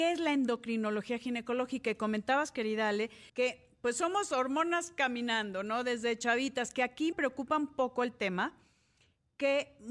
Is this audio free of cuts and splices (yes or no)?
no